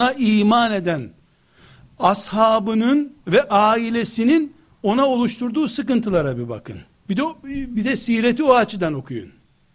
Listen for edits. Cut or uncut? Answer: cut